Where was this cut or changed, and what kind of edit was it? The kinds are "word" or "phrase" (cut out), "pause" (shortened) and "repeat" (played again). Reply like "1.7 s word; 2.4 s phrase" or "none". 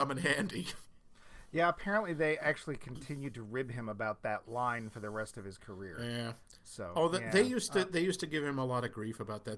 none